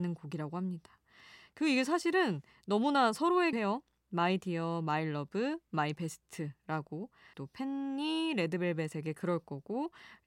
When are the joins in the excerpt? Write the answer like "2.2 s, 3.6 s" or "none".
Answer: 3.5 s, 7.3 s